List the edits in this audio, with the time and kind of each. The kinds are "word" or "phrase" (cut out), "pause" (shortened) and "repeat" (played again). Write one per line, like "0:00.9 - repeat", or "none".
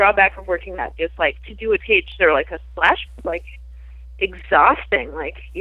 0:01.0 - word
0:01.8 - word
0:02.2 - word
0:03.1 - word